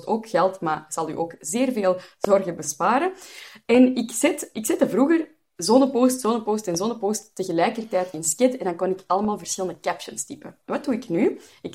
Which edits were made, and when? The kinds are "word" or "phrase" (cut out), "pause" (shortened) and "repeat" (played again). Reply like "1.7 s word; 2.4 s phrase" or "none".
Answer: none